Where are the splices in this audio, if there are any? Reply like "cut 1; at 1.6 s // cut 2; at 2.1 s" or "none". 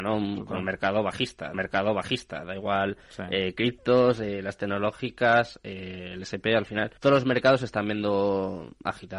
cut 1; at 1.5 s // cut 2; at 7.0 s